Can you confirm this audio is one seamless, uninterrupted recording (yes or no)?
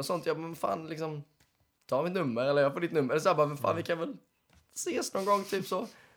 yes